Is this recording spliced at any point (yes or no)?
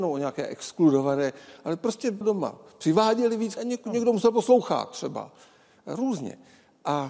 yes